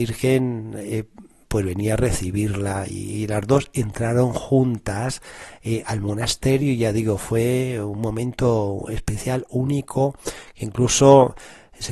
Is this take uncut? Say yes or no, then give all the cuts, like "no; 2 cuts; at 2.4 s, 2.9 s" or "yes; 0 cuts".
yes; 0 cuts